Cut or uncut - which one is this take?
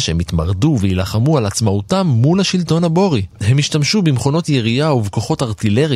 cut